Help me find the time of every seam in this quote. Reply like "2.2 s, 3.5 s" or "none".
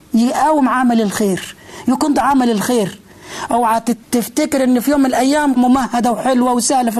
2.1 s, 4.0 s, 5.6 s